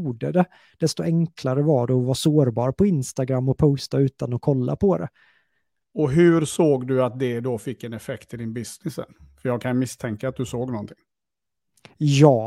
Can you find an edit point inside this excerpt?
no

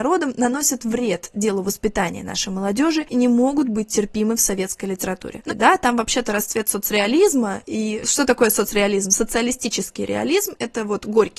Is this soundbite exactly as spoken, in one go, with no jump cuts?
no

